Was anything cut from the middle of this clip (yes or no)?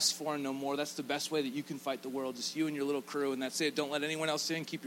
no